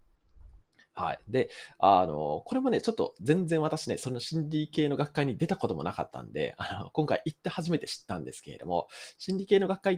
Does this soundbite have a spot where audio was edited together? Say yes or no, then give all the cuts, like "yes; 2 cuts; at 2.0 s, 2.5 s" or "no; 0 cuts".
no; 0 cuts